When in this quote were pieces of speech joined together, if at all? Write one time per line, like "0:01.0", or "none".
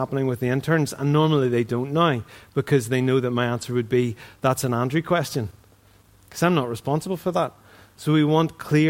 none